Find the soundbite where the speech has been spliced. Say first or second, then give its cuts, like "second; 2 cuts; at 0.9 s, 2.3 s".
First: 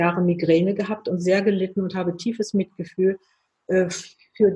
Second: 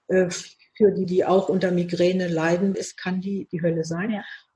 second; 3 cuts; at 1.0 s, 2.7 s, 3.5 s